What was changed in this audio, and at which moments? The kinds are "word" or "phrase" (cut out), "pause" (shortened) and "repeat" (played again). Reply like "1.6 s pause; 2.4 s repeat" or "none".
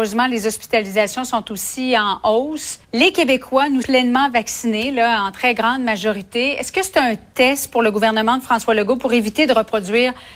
2.8 s pause; 3.8 s word